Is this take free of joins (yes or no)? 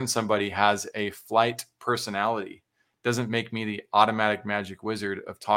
yes